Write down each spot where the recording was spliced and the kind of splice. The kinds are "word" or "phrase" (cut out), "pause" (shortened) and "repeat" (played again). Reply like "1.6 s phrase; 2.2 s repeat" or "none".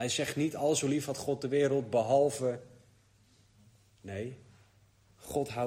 none